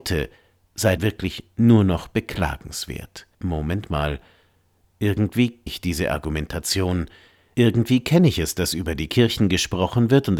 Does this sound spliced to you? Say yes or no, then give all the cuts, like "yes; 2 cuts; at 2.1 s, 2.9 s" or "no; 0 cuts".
yes; 3 cuts; at 1.0 s, 3.3 s, 5.7 s